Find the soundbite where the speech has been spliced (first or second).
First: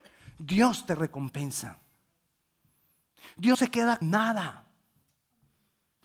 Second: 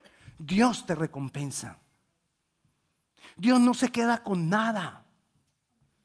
first